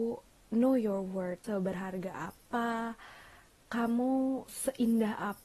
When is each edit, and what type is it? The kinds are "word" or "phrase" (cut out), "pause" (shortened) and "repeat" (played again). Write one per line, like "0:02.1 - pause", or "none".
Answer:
0:01.4 - word
0:04.5 - word